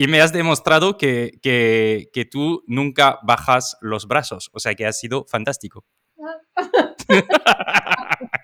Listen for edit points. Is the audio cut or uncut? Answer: uncut